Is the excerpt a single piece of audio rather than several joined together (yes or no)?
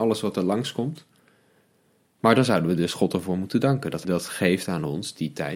no